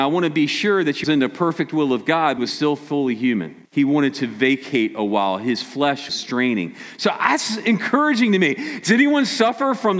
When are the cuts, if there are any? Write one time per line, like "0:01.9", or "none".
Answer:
0:01.0
0:02.4
0:03.6
0:06.1